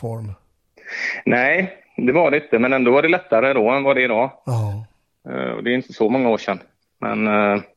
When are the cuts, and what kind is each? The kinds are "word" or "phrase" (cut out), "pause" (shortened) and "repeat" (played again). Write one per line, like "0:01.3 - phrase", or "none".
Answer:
none

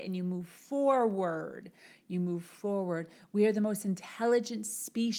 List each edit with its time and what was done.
none

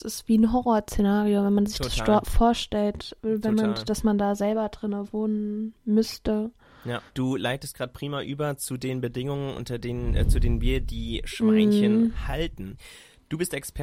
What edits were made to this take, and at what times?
0:07.1 - pause

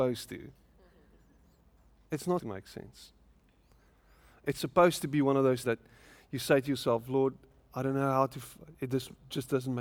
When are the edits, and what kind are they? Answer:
0:02.4 - word
0:05.6 - word

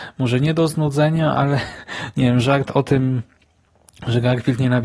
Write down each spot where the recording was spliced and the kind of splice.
none

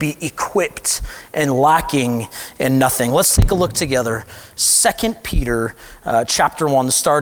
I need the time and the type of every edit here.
none

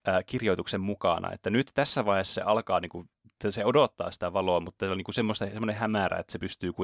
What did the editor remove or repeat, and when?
none

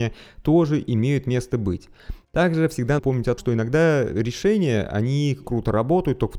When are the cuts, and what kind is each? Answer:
0:03.0 - word
0:03.4 - word
0:05.4 - word

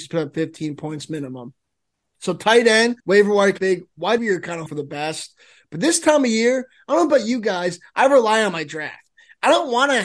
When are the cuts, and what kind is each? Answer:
0:03.0 - pause
0:03.6 - phrase
0:04.2 - word
0:04.7 - word

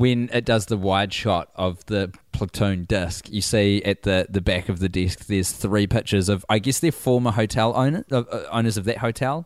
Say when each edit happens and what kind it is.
none

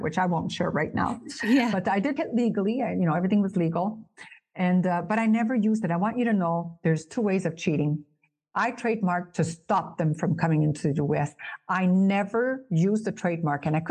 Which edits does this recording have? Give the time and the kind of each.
0:02.2 - word

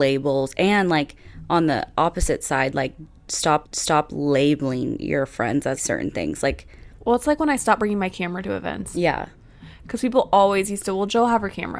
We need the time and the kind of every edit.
0:03.6 - repeat
0:05.8 - word
0:06.9 - pause

